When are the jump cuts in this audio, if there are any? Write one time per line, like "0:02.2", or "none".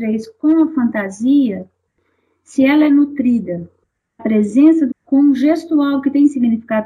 0:04.2
0:04.9